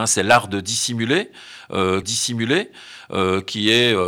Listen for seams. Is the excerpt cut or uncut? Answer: cut